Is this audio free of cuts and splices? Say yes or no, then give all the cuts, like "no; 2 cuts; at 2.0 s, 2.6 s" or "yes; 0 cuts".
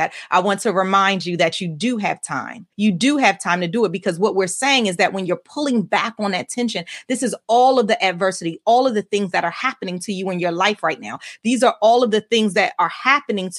no; 1 cut; at 2.7 s